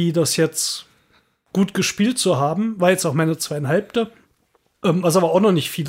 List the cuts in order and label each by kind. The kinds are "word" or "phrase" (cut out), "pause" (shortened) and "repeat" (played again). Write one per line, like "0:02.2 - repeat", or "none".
none